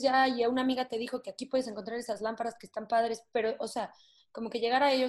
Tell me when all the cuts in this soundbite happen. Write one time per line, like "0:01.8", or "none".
none